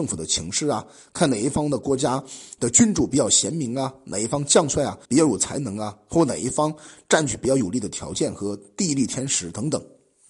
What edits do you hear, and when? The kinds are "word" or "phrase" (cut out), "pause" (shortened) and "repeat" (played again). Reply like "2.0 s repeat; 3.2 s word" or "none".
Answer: 5.0 s pause